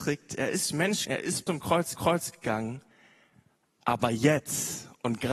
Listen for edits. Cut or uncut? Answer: cut